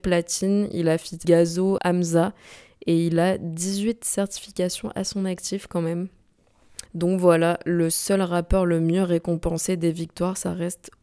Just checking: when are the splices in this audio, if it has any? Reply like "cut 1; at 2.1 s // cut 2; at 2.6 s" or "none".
cut 1; at 1.2 s // cut 2; at 1.8 s // cut 3; at 6.9 s